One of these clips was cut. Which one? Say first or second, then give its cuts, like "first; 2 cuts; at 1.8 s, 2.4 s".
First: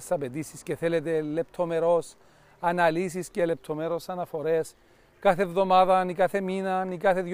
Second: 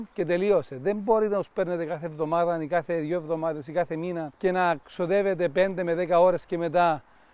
second; 1 cut; at 4.3 s